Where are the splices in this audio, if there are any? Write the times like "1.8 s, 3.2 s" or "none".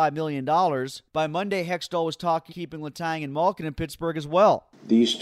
1.1 s, 2.5 s